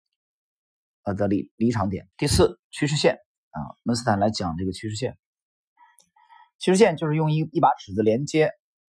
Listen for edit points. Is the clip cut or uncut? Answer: cut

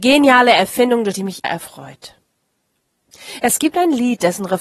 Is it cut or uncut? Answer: cut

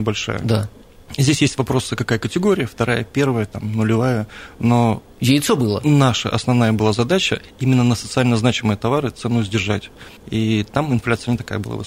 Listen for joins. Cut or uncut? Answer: cut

